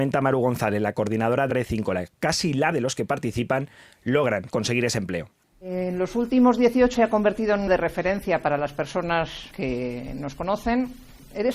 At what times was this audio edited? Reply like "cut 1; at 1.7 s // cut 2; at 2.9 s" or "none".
cut 1; at 1.5 s // cut 2; at 2.7 s // cut 3; at 4.5 s // cut 4; at 5.4 s // cut 5; at 7.0 s // cut 6; at 7.7 s // cut 7; at 9.5 s